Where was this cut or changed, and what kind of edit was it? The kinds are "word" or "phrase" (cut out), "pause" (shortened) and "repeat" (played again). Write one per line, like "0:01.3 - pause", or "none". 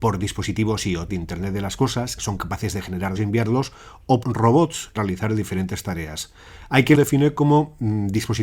0:01.1 - word
0:02.2 - word
0:03.2 - word
0:04.2 - word
0:05.0 - word
0:06.9 - word